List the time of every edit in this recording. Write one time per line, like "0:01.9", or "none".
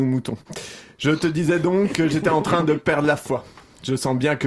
none